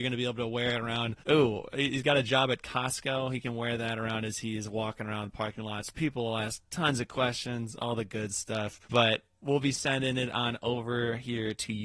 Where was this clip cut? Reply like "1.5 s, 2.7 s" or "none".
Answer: 1.2 s, 8.8 s